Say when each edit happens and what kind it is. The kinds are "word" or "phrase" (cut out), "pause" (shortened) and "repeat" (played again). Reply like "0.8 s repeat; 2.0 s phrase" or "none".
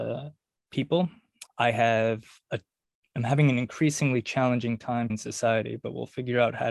1.5 s word; 5.1 s word